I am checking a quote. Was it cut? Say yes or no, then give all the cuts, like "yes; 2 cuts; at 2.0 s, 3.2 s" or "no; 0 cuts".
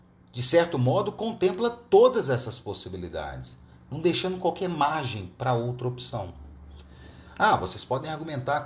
no; 0 cuts